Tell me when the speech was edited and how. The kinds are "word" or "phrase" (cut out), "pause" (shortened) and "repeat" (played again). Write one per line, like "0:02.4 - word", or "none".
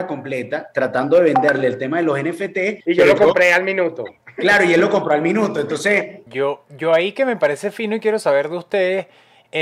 0:02.8 - pause
0:06.3 - pause